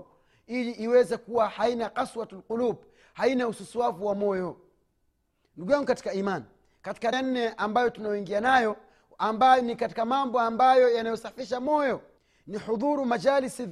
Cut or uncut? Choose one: cut